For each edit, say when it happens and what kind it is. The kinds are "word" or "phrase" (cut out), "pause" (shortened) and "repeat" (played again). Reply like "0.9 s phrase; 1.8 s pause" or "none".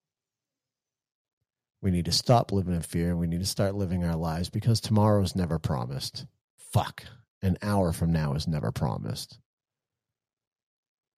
none